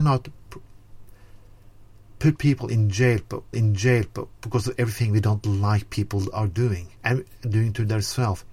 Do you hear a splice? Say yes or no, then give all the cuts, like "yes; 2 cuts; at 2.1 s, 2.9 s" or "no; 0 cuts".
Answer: yes; 2 cuts; at 3.5 s, 7.0 s